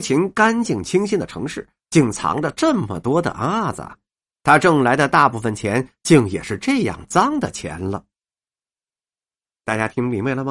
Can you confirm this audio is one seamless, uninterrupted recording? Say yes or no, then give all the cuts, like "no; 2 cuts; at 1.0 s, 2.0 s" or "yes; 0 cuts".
yes; 0 cuts